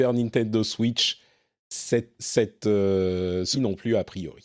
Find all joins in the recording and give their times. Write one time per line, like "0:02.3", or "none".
0:02.2
0:03.5